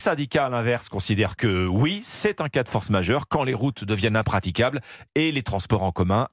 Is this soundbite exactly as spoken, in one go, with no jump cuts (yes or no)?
yes